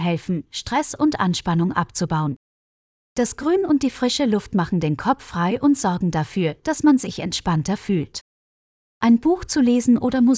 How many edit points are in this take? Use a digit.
0